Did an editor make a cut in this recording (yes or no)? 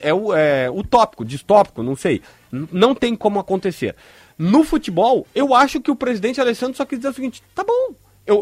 no